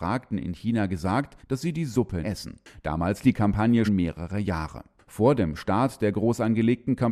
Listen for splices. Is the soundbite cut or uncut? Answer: cut